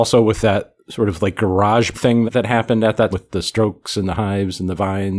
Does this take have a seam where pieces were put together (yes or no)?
yes